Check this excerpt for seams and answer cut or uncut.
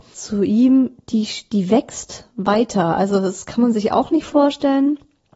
uncut